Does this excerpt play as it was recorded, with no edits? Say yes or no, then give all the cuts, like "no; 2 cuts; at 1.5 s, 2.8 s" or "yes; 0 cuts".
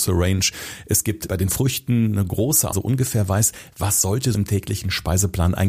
no; 3 cuts; at 1.3 s, 2.7 s, 4.3 s